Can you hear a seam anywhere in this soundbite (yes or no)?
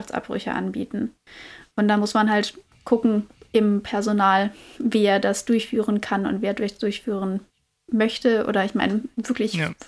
no